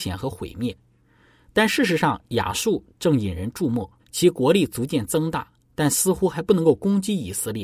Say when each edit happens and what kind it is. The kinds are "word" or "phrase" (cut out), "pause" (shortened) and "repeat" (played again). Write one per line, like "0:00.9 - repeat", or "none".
0:04.0 - pause